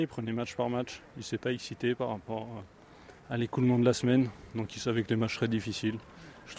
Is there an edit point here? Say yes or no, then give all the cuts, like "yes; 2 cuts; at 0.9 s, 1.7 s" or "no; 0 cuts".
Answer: yes; 1 cut; at 3.2 s